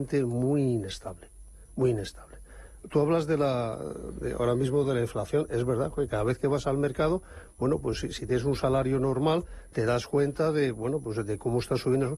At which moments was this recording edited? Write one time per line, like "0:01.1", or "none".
none